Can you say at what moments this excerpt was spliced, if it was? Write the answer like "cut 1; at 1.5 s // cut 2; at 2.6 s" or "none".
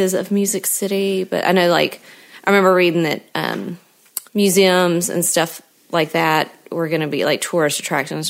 cut 1; at 4.3 s